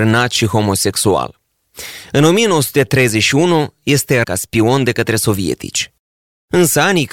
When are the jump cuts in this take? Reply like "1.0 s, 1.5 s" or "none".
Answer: 4.2 s